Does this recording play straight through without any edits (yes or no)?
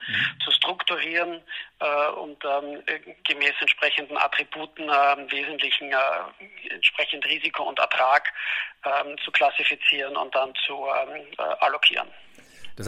yes